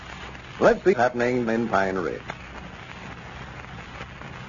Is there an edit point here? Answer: yes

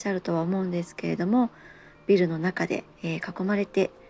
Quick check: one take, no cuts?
no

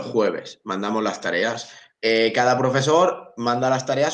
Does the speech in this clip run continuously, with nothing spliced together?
yes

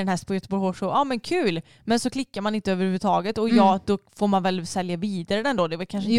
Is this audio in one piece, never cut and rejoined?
yes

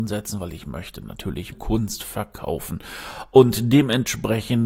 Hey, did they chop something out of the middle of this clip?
yes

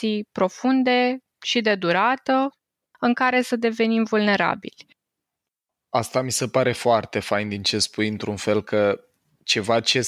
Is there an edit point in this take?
no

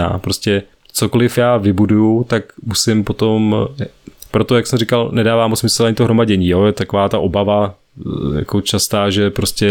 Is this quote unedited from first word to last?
yes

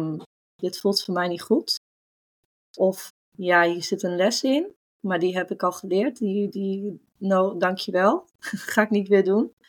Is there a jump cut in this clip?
yes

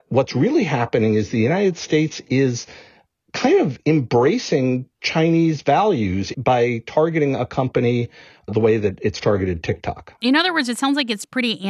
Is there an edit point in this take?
yes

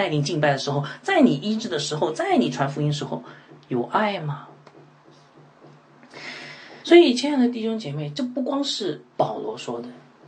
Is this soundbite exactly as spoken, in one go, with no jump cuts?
no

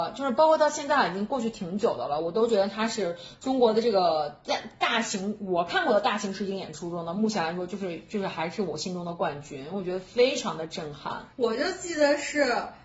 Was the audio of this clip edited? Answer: yes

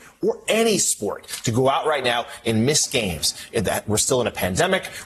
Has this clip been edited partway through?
no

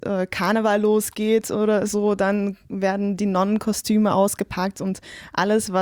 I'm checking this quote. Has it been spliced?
no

